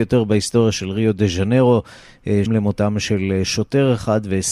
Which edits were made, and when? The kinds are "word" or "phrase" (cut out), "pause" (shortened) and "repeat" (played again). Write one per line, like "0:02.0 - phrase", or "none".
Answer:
0:02.5 - word